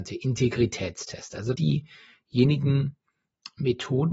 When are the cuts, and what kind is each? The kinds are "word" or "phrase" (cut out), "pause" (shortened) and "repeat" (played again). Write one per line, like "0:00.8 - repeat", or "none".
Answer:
0:01.6 - phrase